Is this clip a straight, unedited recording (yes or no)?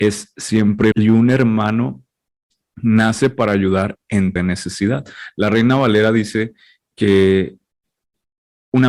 no